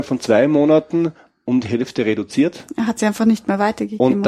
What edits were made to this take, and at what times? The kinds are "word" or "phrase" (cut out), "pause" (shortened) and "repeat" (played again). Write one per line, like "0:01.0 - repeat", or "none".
none